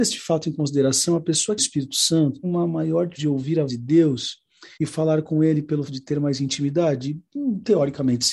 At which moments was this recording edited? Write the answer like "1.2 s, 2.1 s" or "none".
1.6 s, 2.4 s, 3.2 s, 3.7 s, 4.7 s, 5.9 s